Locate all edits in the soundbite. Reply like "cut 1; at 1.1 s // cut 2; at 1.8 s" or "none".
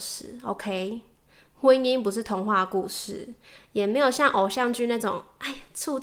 none